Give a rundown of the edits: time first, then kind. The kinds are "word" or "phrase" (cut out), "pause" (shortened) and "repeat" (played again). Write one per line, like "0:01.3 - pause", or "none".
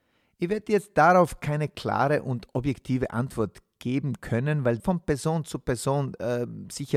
0:04.8 - word